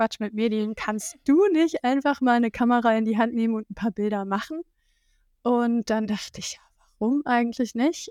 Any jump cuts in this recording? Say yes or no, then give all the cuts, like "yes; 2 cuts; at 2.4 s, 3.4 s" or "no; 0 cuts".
no; 0 cuts